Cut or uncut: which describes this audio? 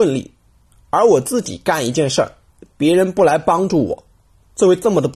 uncut